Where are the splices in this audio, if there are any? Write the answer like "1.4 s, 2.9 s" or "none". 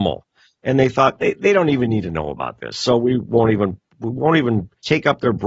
none